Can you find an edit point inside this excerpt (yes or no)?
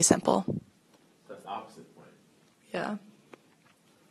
yes